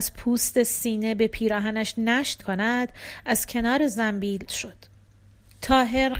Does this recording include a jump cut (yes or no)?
yes